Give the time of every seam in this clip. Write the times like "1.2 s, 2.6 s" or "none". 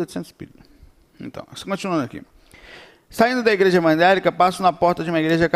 none